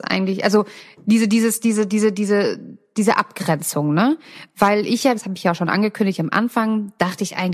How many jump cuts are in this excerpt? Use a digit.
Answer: 1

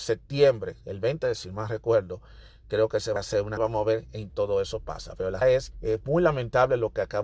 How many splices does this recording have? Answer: 6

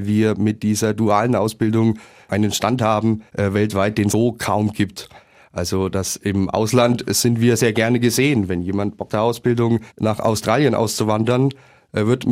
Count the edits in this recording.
5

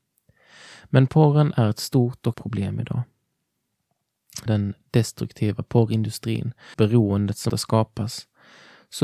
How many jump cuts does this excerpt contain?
4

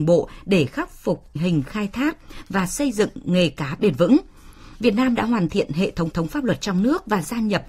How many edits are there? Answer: 2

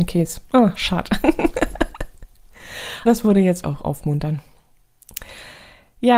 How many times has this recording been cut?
2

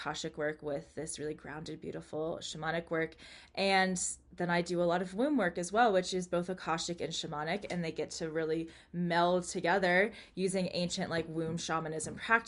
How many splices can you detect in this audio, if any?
0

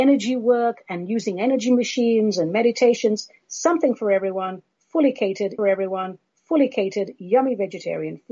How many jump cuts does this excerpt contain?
1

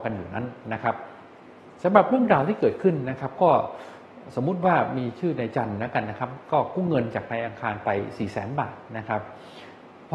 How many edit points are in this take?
1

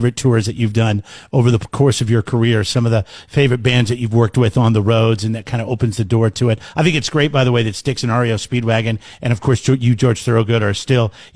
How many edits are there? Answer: 0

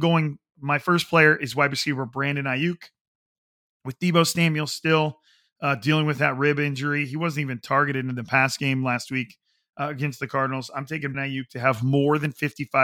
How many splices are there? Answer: 1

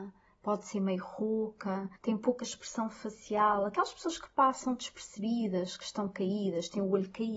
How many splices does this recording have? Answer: 1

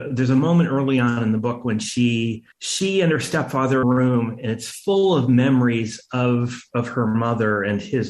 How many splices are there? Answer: 2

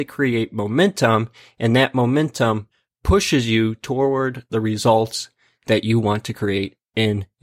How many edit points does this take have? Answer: 0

